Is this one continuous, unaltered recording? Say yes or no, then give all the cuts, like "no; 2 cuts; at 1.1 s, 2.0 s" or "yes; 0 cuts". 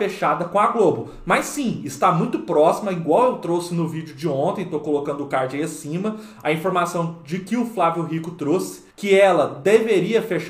no; 1 cut; at 8.9 s